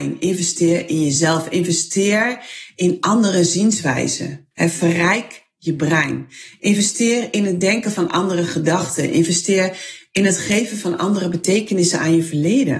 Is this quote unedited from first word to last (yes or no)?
no